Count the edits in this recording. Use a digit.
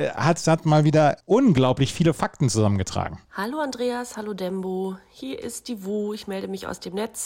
2